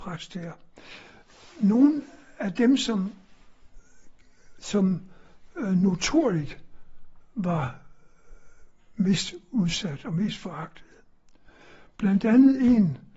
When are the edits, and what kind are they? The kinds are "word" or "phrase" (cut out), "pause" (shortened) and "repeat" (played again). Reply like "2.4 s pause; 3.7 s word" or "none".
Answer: none